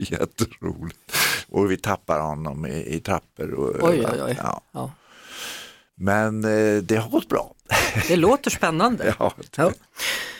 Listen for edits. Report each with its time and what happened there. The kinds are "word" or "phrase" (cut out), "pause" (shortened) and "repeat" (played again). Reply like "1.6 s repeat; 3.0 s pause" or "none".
none